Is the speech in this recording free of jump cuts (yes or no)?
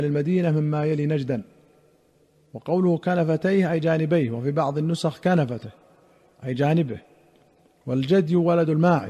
yes